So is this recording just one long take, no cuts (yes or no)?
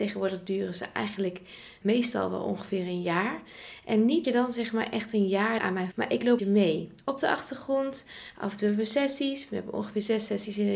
no